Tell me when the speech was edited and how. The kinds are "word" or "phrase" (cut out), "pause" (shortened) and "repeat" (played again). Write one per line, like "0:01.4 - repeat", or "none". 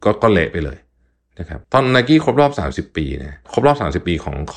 0:01.6 - pause